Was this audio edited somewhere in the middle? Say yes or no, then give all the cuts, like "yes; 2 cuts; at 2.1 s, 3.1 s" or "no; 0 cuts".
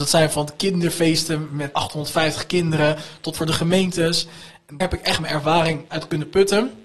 yes; 4 cuts; at 1.7 s, 3.4 s, 4.8 s, 5.9 s